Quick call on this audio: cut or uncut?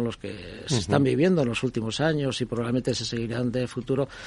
uncut